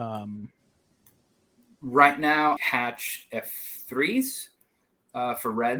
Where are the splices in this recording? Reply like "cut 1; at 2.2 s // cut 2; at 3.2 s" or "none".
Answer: cut 1; at 2.6 s